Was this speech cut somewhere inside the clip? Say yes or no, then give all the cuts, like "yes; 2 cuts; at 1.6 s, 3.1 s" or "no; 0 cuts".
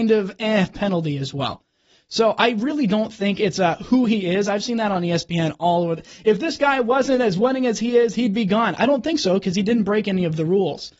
no; 0 cuts